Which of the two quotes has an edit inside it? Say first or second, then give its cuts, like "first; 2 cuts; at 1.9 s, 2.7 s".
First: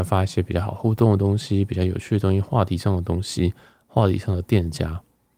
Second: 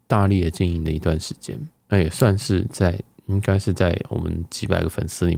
second; 1 cut; at 1.8 s